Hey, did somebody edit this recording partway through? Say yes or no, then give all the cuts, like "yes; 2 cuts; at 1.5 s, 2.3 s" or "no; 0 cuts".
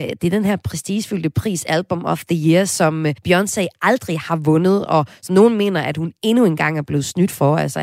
yes; 1 cut; at 3.2 s